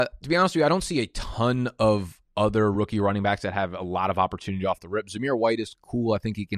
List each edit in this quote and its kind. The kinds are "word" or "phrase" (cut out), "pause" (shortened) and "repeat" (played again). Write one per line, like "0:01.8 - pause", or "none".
none

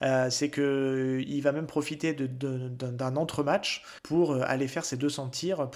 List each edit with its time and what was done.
0:04.0 - pause

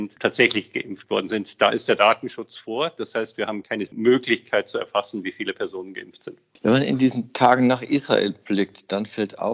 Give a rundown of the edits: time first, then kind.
0:03.9 - word

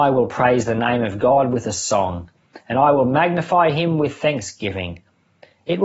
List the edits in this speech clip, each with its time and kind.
none

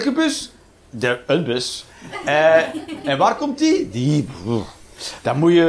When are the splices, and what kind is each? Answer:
none

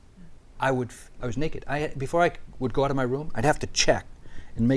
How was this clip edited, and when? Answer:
0:01.2 - phrase

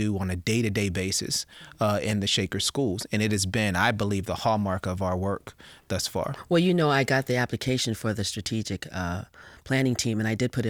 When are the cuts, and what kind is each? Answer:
none

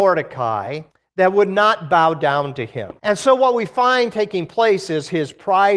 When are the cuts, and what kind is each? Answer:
0:00.9 - pause
0:03.0 - pause

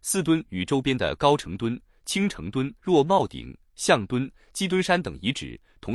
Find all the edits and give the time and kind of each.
0:02.8 - pause

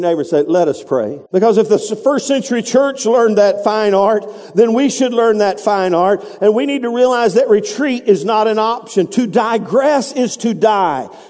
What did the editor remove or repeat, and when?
0:01.3 - pause

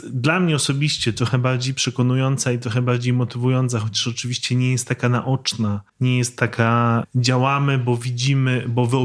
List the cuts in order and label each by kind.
0:05.9 - pause

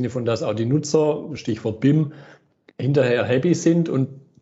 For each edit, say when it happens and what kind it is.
none

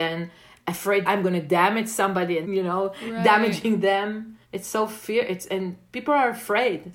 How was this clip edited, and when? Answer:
0:01.1 - word
0:02.4 - word
0:04.4 - pause

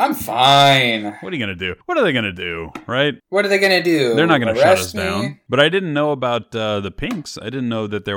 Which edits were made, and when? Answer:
0:01.8 - pause
0:03.2 - pause

